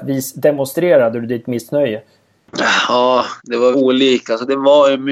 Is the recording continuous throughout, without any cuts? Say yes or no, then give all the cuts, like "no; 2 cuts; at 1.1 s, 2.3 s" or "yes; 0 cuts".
no; 2 cuts; at 3.4 s, 3.7 s